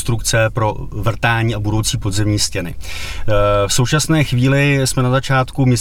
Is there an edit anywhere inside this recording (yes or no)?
no